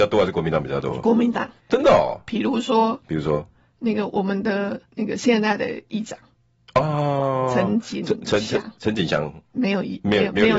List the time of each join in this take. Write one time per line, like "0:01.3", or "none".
0:01.6
0:04.9